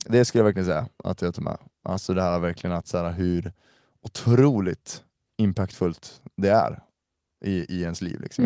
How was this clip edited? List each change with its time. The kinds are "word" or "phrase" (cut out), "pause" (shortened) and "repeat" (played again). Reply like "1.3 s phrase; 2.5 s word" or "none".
none